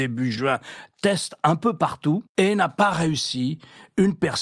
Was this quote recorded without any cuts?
yes; 0 cuts

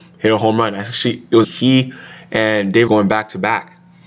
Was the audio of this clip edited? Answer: yes; 2 cuts; at 1.4 s, 2.9 s

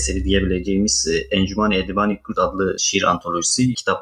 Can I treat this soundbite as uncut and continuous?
yes; 0 cuts

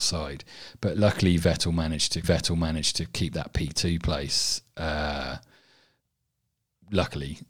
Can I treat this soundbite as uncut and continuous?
no; 1 cut; at 2.2 s

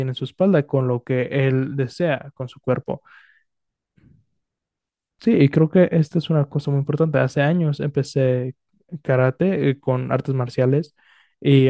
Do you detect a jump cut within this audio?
no; 0 cuts

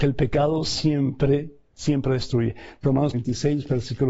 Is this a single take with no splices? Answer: no; 2 cuts; at 1.7 s, 3.1 s

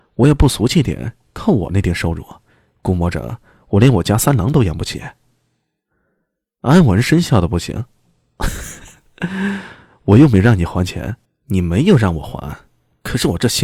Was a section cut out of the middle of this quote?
yes; 1 cut; at 11.2 s

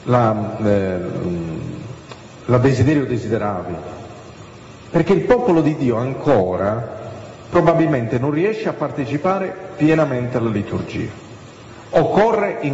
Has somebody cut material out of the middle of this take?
no; 0 cuts

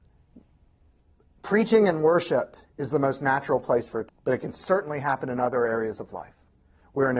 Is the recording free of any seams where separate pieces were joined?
no; 1 cut; at 4.1 s

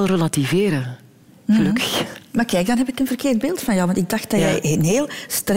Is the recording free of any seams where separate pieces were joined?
yes; 0 cuts

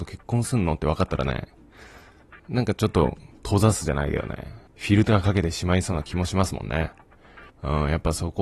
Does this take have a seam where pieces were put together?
yes; 3 cuts; at 2.4 s, 4.7 s, 7.5 s

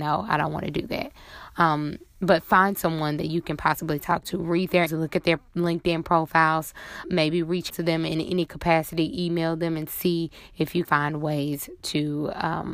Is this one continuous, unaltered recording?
no; 4 cuts; at 4.9 s, 7.0 s, 7.7 s, 10.8 s

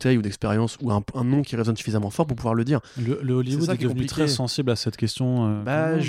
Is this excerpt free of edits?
yes; 0 cuts

